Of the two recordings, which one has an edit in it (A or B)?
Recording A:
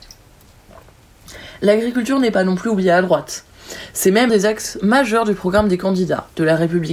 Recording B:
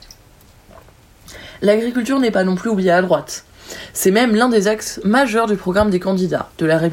A